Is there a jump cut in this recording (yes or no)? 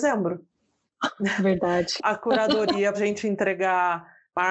yes